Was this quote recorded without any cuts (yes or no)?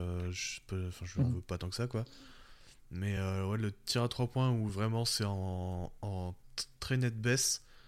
yes